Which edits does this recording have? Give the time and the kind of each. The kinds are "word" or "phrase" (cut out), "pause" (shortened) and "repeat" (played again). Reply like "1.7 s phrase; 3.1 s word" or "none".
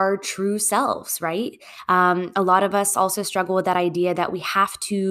none